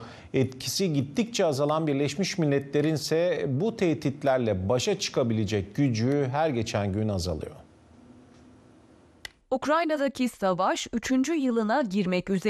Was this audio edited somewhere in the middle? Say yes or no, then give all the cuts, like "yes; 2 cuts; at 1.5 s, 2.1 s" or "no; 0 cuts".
no; 0 cuts